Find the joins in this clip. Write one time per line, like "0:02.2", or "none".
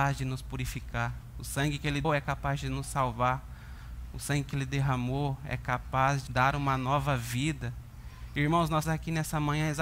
0:02.0
0:06.3
0:08.8